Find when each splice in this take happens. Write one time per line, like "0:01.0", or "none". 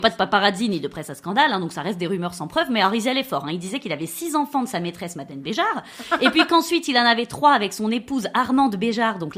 none